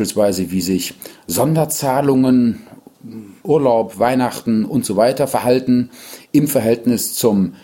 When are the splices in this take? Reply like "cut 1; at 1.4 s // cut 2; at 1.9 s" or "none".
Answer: cut 1; at 3.4 s